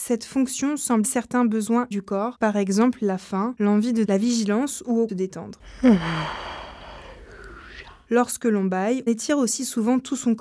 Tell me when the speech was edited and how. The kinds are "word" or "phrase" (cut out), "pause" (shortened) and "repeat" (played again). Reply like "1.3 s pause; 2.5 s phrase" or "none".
1.0 s word; 1.9 s word; 2.4 s word; 4.0 s word; 5.1 s phrase; 9.1 s word